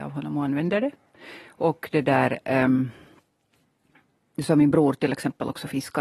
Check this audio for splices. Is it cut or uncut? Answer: uncut